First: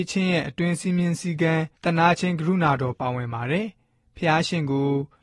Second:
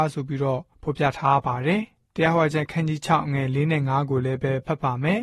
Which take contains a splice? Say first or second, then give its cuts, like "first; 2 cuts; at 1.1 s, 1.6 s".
first; 1 cut; at 1.7 s